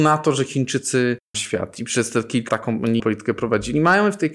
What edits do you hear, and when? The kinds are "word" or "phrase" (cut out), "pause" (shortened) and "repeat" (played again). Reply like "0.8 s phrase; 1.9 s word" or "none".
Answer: 1.3 s phrase; 2.5 s word; 3.0 s word